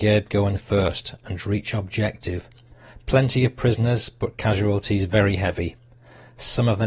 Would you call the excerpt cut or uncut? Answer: uncut